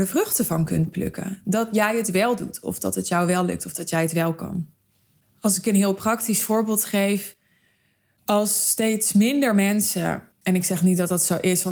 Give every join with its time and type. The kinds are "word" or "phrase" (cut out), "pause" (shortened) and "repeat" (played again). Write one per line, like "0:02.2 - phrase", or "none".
0:10.3 - pause